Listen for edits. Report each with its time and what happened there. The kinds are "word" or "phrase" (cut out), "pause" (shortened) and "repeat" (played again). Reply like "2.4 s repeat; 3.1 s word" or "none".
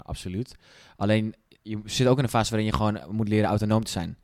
none